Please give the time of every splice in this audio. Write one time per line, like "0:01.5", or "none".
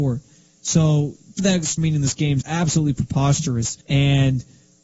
0:01.4
0:01.8
0:02.4
0:03.8